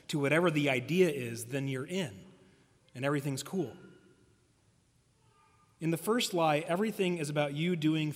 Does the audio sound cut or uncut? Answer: uncut